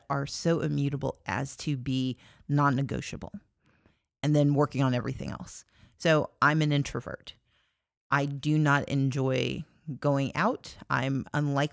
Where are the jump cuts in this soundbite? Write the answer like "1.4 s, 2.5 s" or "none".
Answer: none